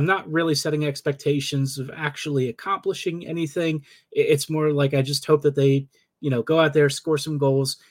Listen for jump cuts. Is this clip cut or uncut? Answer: uncut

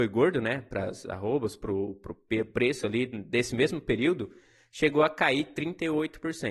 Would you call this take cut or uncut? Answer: uncut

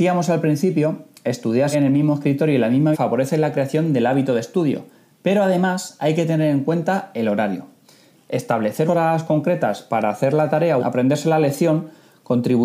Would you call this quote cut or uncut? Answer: cut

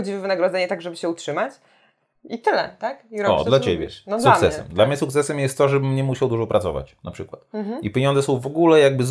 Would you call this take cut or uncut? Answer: uncut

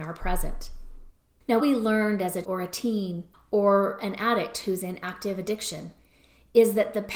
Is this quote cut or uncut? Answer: cut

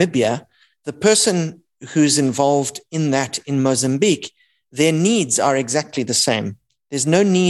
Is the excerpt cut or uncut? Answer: uncut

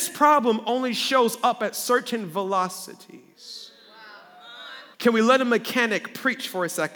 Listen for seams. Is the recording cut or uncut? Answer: cut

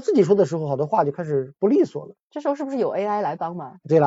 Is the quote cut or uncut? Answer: uncut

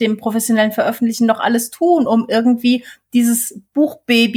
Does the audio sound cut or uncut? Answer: uncut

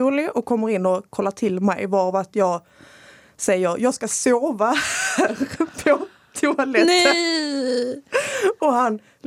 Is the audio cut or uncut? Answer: uncut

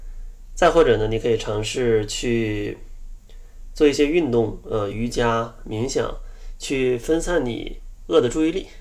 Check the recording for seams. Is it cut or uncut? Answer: uncut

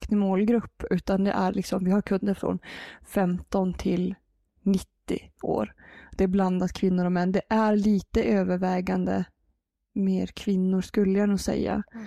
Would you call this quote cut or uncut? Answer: uncut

